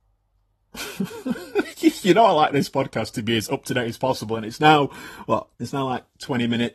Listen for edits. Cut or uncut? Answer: cut